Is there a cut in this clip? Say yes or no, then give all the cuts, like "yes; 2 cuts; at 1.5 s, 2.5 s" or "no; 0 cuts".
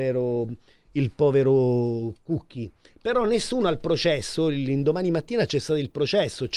no; 0 cuts